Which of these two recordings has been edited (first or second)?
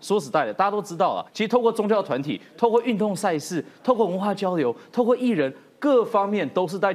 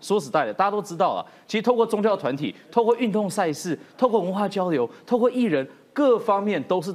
first